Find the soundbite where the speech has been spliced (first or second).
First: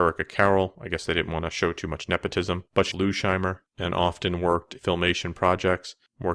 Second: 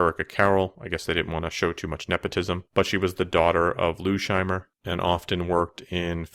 first